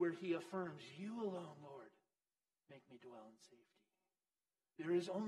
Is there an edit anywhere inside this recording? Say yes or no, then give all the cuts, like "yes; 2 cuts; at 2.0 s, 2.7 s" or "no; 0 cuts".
yes; 1 cut; at 2.1 s